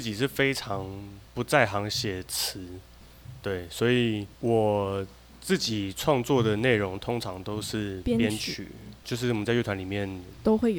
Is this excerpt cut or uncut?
cut